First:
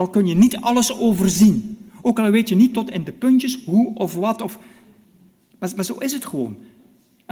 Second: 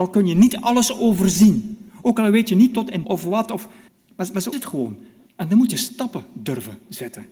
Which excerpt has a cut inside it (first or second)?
second